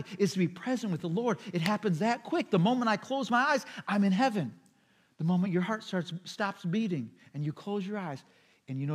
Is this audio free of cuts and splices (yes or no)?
yes